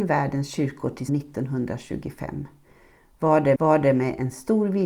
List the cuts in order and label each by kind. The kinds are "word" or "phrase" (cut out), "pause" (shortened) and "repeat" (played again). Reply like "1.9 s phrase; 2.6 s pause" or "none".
1.1 s word; 3.6 s repeat